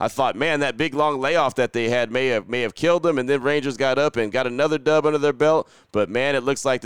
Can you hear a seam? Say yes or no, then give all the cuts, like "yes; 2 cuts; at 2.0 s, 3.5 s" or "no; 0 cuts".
no; 0 cuts